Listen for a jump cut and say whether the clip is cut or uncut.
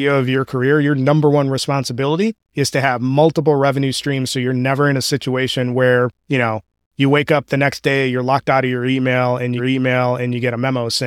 cut